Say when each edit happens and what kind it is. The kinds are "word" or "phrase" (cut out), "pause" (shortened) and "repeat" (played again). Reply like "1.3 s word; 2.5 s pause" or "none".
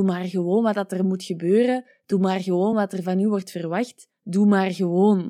none